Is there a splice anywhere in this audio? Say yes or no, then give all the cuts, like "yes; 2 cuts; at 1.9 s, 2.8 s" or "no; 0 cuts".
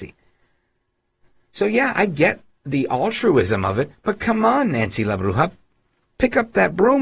no; 0 cuts